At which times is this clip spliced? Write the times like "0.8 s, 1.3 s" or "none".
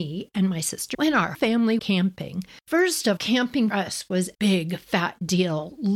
0.9 s, 1.3 s, 1.8 s, 3.2 s, 3.7 s, 4.3 s